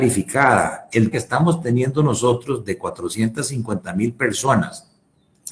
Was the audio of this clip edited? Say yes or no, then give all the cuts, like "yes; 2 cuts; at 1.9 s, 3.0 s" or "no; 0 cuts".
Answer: yes; 1 cut; at 1.1 s